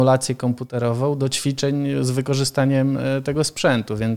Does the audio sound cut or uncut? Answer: uncut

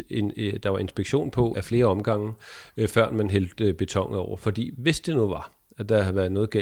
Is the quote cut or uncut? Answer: cut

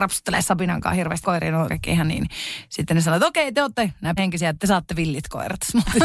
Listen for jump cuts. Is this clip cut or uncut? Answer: cut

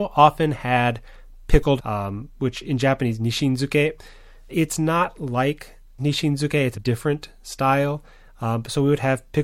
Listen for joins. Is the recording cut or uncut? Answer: cut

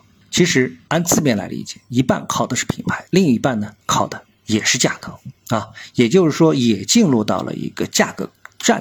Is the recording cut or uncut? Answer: cut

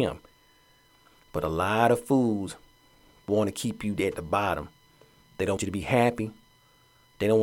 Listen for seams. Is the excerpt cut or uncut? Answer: cut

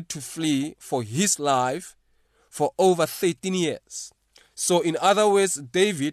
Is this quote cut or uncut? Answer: uncut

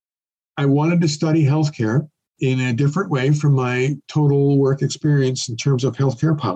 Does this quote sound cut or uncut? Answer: uncut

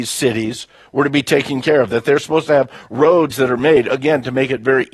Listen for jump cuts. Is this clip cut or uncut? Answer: uncut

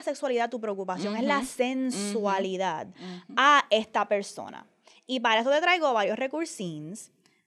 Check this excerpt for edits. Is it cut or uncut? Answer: uncut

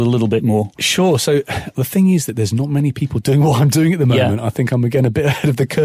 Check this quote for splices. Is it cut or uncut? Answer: cut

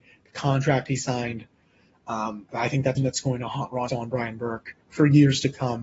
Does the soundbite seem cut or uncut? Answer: cut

